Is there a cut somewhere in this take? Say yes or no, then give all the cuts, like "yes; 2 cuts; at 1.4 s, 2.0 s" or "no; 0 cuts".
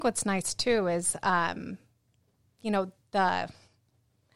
no; 0 cuts